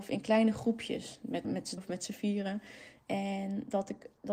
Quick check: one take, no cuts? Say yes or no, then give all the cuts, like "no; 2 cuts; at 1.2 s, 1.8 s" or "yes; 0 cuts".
no; 2 cuts; at 1.4 s, 1.8 s